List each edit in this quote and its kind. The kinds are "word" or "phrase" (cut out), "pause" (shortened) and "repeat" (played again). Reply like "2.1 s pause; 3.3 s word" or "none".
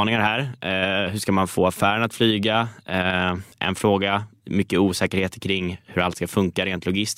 3.5 s pause